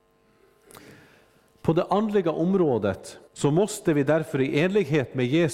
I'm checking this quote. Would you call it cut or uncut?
cut